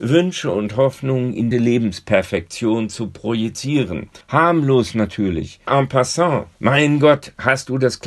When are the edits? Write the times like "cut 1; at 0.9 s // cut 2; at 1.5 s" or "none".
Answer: cut 1; at 1.5 s // cut 2; at 4.2 s // cut 3; at 5.7 s // cut 4; at 6.5 s

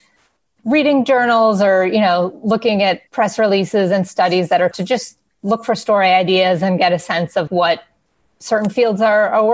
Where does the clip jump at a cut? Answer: cut 1; at 3.1 s // cut 2; at 4.7 s // cut 3; at 7.5 s

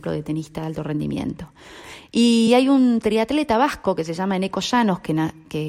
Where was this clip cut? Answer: none

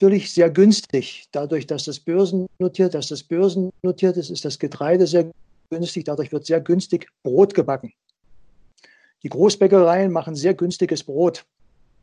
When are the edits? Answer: cut 1; at 2.9 s

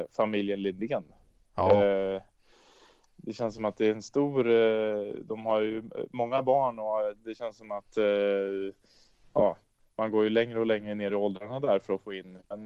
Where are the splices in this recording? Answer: none

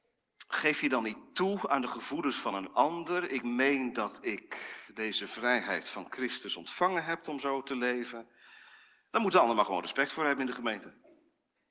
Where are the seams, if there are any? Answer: none

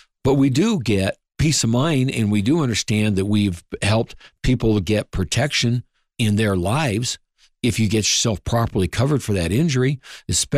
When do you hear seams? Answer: none

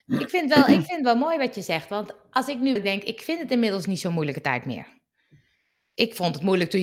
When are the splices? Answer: cut 1; at 2.8 s

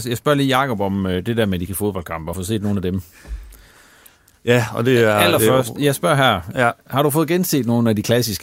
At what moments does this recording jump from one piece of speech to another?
cut 1; at 1.7 s // cut 2; at 2.3 s

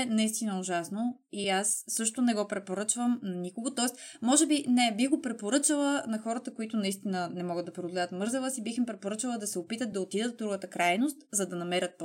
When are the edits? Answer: none

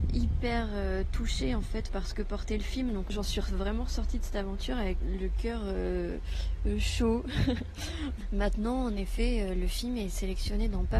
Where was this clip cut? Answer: cut 1; at 5.0 s

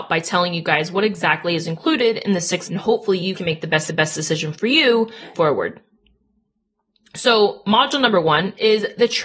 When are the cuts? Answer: cut 1; at 2.7 s // cut 2; at 3.3 s // cut 3; at 3.9 s // cut 4; at 5.3 s

